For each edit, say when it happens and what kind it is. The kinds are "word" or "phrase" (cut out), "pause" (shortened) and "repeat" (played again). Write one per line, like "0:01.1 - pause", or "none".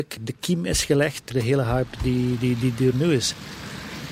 0:01.3 - word